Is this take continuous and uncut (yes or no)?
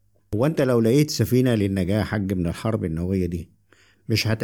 yes